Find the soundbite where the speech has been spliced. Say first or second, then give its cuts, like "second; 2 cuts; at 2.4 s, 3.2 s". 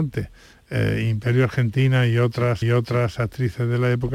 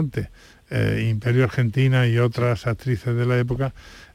first; 1 cut; at 2.6 s